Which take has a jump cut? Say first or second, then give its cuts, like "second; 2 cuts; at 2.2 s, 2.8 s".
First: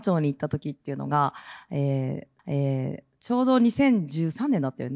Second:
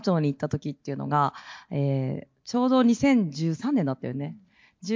first; 1 cut; at 2.4 s